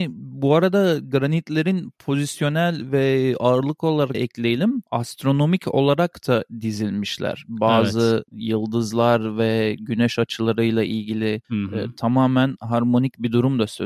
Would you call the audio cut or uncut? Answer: cut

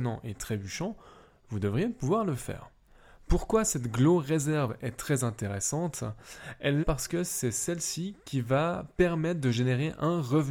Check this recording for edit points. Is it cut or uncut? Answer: cut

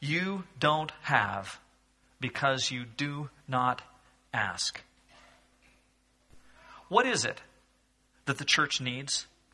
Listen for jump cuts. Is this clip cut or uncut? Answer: uncut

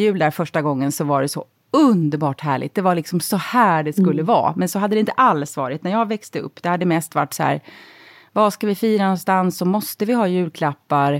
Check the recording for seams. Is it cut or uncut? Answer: uncut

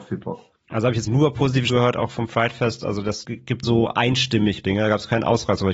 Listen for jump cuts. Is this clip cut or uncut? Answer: cut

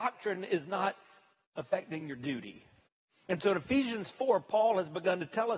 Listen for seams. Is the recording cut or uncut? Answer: uncut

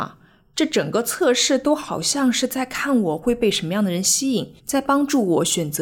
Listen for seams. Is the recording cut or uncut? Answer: cut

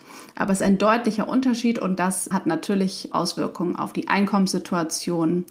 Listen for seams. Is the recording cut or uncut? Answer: cut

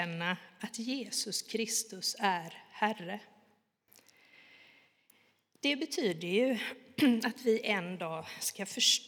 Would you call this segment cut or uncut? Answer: uncut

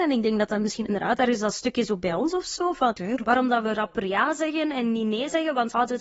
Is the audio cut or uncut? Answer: uncut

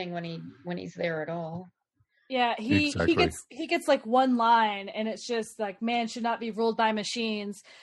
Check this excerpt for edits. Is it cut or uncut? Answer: uncut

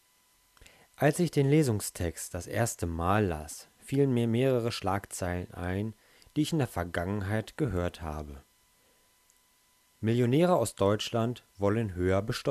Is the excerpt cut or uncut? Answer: uncut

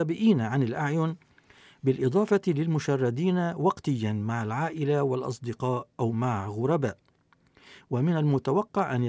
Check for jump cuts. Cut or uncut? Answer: uncut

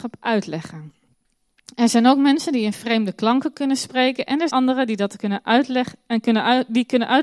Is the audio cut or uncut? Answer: cut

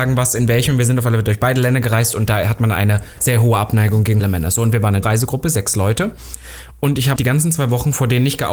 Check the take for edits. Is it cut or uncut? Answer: cut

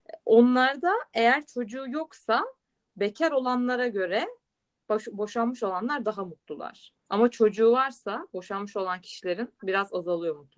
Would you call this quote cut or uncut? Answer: uncut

